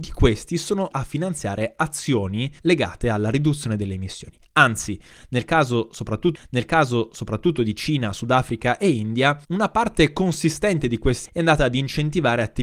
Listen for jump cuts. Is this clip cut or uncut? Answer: cut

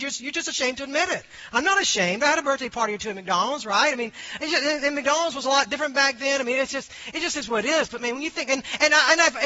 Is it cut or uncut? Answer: uncut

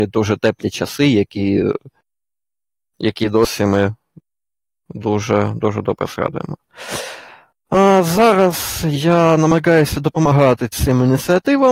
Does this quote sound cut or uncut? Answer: uncut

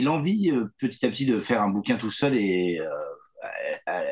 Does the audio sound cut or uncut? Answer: uncut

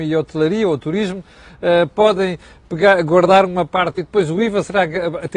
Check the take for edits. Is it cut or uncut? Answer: cut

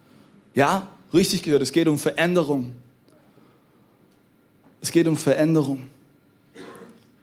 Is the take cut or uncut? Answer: uncut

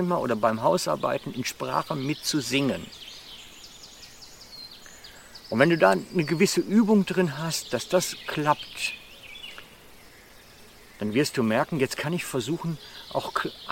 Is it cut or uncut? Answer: uncut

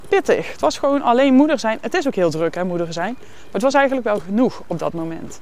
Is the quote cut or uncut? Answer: uncut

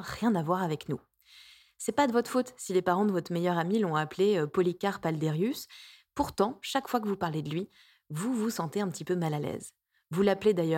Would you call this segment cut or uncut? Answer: uncut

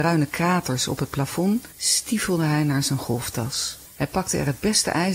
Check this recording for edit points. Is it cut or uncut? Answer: cut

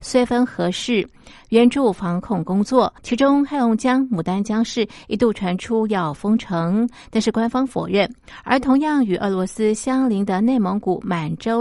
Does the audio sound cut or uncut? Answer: cut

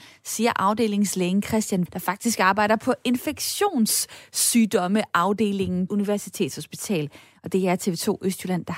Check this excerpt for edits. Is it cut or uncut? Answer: cut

